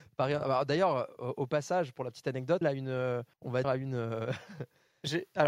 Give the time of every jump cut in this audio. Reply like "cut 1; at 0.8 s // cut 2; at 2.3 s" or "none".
cut 1; at 2.6 s // cut 2; at 3.3 s // cut 3; at 3.6 s